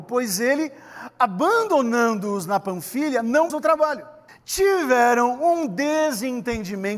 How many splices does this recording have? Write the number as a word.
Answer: two